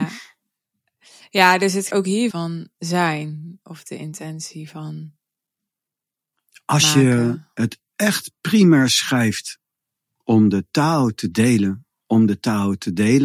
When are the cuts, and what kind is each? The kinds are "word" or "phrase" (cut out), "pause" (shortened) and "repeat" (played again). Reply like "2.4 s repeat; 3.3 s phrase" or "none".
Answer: 1.9 s word; 2.3 s phrase; 8.4 s pause